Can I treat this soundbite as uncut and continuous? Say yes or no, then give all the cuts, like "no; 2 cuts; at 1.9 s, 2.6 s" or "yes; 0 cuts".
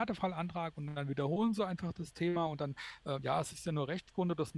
yes; 0 cuts